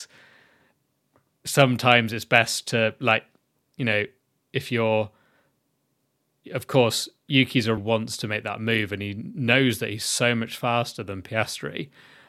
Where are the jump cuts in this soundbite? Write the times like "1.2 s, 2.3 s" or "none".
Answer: 7.8 s